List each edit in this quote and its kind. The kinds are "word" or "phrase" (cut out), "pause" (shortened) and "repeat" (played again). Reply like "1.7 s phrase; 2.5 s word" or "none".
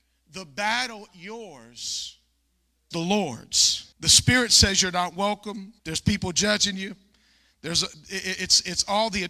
1.1 s phrase; 2.9 s phrase; 3.9 s pause; 5.8 s pause